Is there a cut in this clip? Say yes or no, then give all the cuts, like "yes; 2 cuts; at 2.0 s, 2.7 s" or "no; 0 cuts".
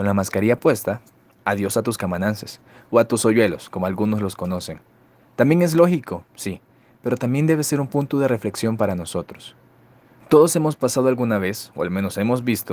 no; 0 cuts